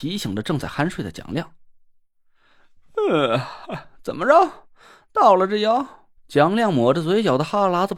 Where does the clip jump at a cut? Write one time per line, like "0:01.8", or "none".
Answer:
0:06.2